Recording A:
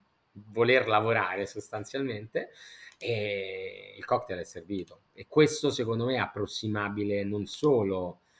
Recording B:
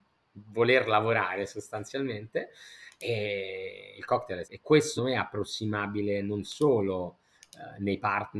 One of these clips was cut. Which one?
B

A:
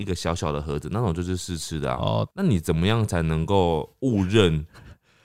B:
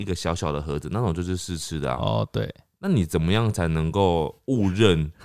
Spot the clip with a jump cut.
A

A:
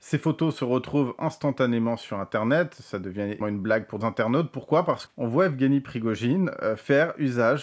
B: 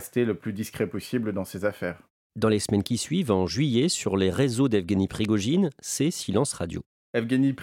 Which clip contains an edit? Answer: A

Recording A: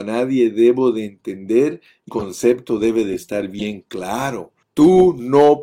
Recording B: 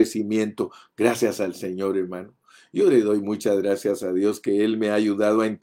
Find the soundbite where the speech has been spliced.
A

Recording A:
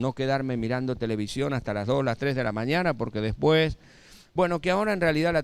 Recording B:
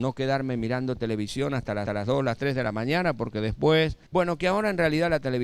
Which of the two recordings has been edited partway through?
B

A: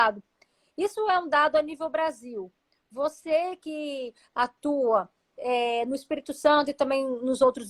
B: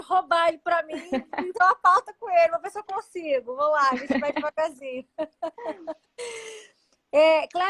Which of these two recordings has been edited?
B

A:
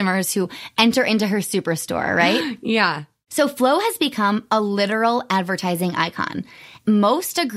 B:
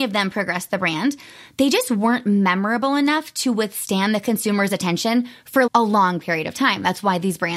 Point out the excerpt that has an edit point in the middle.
B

